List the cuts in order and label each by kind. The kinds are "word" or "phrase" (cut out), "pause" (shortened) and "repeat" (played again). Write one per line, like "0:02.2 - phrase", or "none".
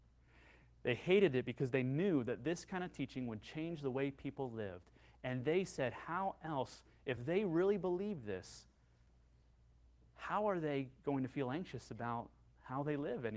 none